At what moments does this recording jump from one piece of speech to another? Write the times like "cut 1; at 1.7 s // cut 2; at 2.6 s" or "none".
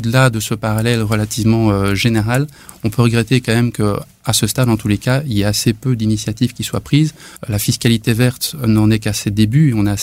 cut 1; at 7.4 s

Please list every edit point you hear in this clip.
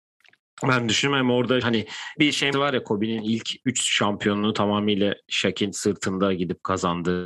cut 1; at 1.6 s // cut 2; at 2.2 s // cut 3; at 2.5 s

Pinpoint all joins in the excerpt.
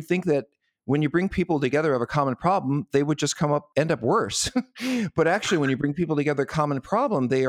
none

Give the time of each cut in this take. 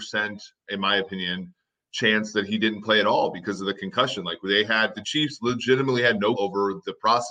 cut 1; at 4.9 s // cut 2; at 6.3 s

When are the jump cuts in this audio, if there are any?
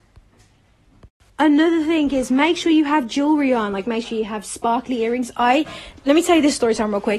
none

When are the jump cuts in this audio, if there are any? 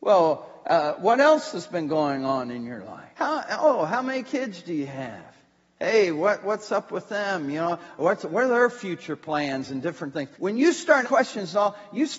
cut 1; at 3.1 s // cut 2; at 10.3 s // cut 3; at 11.0 s

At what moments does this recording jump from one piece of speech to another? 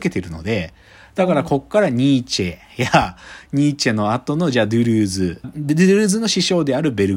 cut 1; at 5.4 s

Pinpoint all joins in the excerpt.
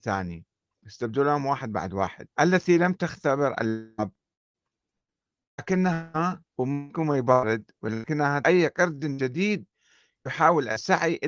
cut 1; at 2.3 s // cut 2; at 6.5 s // cut 3; at 8.4 s

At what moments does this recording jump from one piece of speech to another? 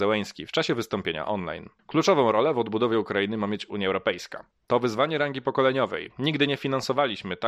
cut 1; at 1.8 s // cut 2; at 4.5 s

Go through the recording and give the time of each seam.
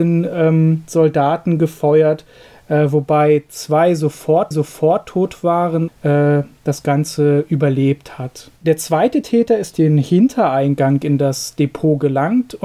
cut 1; at 4.5 s // cut 2; at 5.9 s // cut 3; at 8.6 s // cut 4; at 9.7 s

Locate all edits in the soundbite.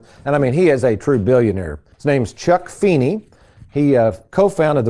cut 1; at 1.9 s

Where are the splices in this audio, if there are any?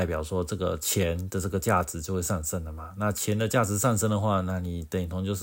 none

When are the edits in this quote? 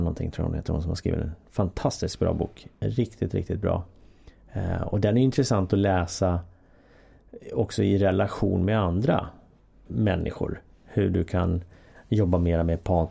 cut 1; at 2.7 s // cut 2; at 9.9 s

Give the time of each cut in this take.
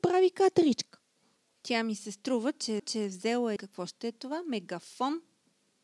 cut 1; at 1.2 s // cut 2; at 2.8 s // cut 3; at 3.6 s

